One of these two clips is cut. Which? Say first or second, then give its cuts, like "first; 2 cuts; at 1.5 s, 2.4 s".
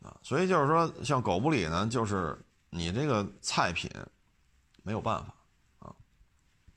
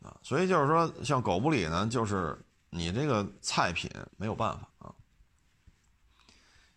second; 2 cuts; at 4.1 s, 4.7 s